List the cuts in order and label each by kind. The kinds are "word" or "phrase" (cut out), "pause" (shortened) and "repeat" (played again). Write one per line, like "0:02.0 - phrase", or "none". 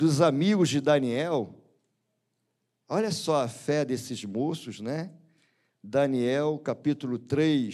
none